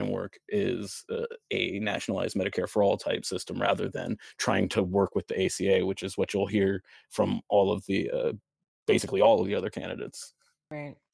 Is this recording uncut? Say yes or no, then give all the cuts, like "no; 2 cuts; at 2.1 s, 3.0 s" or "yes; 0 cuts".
yes; 0 cuts